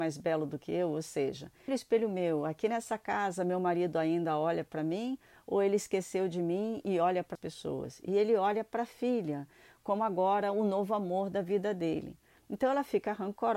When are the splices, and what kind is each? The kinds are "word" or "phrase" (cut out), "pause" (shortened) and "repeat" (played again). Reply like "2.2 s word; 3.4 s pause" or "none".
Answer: 1.7 s word; 7.3 s word